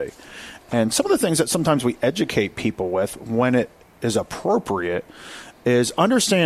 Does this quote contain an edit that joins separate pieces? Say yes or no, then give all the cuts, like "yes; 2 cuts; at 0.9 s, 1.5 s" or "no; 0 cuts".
no; 0 cuts